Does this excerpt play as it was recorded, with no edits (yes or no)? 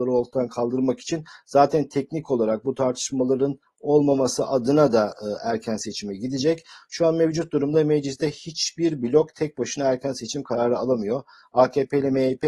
yes